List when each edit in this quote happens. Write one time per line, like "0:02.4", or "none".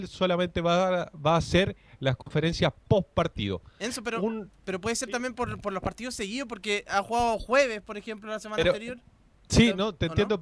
none